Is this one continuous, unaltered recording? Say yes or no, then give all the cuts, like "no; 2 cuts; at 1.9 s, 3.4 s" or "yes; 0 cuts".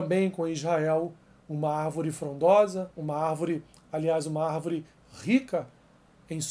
yes; 0 cuts